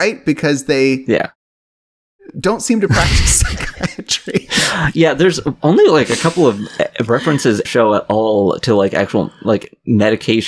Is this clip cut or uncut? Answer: cut